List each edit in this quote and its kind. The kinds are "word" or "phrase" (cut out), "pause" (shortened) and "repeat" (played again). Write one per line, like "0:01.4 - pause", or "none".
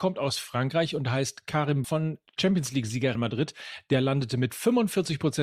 0:01.8 - word
0:02.3 - pause
0:03.2 - word